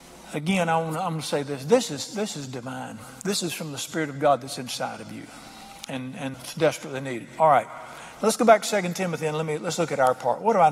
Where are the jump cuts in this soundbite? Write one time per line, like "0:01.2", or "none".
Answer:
0:06.3